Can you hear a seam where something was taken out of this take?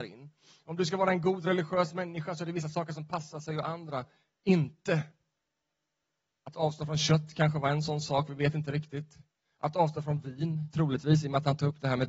no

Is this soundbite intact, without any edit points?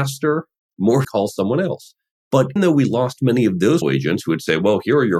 no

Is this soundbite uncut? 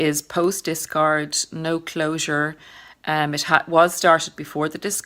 yes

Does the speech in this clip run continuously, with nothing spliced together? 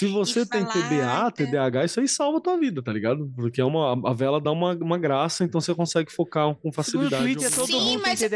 yes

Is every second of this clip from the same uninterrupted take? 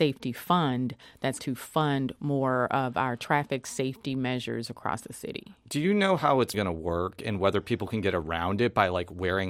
no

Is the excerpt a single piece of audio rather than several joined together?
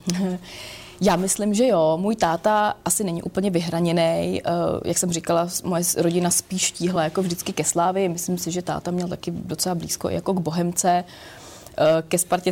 yes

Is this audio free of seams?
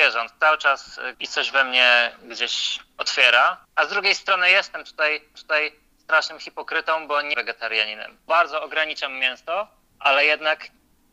no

